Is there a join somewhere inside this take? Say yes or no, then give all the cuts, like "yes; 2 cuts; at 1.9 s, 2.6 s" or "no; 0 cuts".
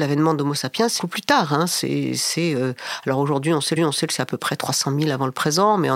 yes; 2 cuts; at 1.0 s, 3.8 s